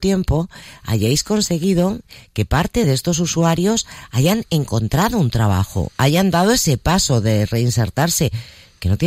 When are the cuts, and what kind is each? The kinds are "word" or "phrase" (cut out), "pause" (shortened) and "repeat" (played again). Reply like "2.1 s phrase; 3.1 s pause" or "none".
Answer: none